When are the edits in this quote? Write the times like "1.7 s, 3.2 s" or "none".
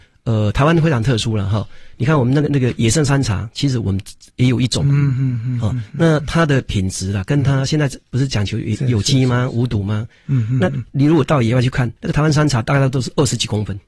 12.0 s